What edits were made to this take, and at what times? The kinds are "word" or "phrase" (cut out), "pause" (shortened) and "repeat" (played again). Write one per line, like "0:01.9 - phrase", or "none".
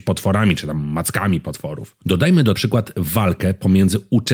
0:02.5 - phrase